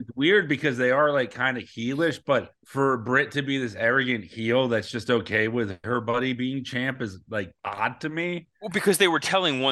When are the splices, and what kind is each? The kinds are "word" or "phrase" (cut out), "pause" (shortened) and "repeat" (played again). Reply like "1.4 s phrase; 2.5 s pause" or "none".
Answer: 2.6 s pause; 7.6 s pause